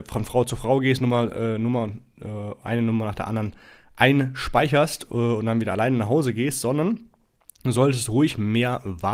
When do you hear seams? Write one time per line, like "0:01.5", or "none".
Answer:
none